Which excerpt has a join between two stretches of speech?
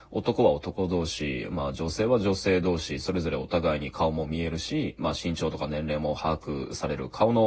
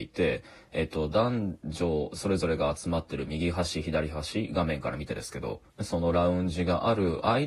second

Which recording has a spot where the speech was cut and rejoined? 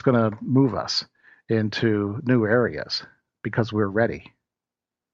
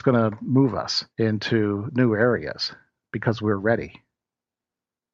second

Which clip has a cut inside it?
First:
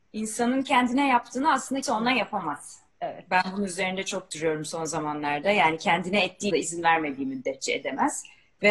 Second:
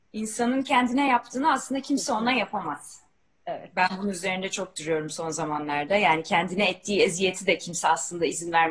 first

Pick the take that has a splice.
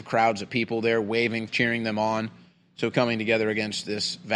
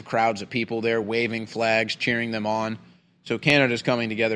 first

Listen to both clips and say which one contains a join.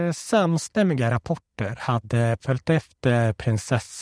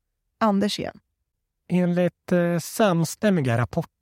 first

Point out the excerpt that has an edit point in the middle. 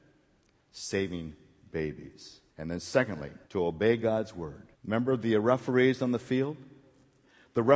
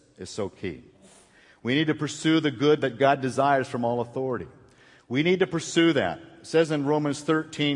first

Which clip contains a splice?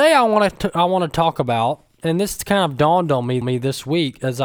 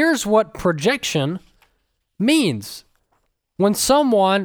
first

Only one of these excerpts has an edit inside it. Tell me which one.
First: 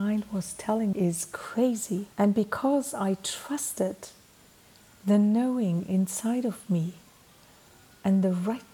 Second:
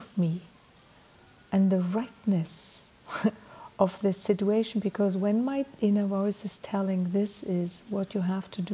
first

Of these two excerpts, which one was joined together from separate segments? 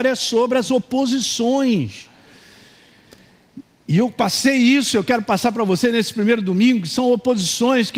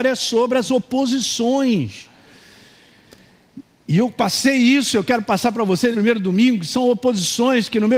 second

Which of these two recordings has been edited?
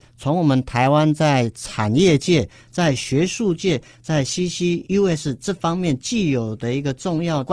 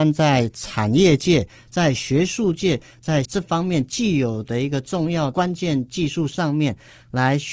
second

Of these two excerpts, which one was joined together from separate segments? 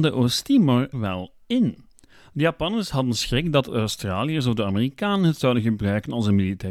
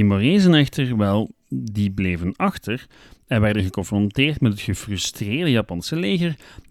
first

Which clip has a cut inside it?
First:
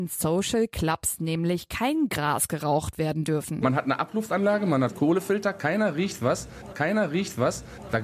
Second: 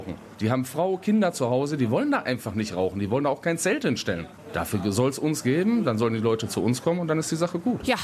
first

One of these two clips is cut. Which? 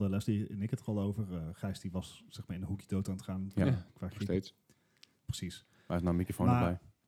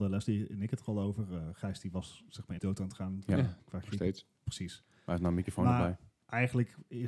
second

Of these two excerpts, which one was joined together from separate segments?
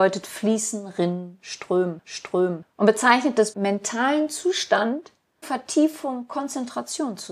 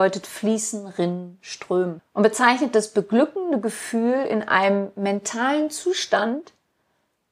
first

